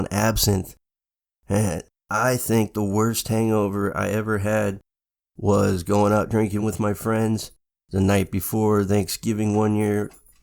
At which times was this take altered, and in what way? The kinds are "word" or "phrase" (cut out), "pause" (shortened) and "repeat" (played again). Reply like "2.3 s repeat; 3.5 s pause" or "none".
none